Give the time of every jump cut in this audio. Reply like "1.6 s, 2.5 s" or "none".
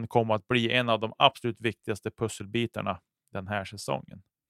none